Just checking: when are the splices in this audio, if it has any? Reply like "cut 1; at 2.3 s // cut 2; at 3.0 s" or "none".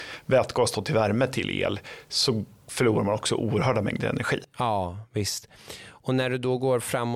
none